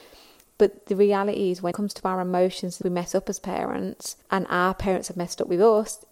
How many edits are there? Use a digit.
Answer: 3